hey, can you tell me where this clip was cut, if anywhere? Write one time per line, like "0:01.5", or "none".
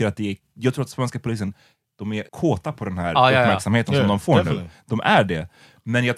0:02.3